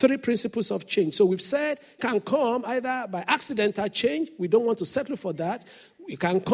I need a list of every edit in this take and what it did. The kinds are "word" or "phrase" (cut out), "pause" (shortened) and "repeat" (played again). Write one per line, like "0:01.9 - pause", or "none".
0:02.0 - word